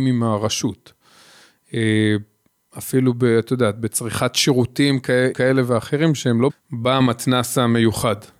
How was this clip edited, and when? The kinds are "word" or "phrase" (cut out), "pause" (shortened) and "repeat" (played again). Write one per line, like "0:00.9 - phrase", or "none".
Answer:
0:05.3 - word
0:06.5 - word